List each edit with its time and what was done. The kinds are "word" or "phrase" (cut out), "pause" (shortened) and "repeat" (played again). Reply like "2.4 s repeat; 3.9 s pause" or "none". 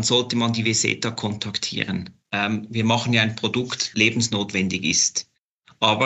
3.9 s phrase